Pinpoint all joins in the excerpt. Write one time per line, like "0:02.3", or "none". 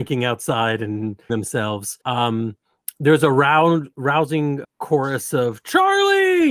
0:01.3
0:02.0
0:04.6